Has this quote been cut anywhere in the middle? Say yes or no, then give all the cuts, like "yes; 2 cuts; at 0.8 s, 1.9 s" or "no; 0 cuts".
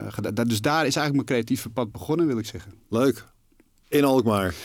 no; 0 cuts